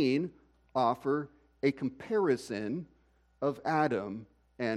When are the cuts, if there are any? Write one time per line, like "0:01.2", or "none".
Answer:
none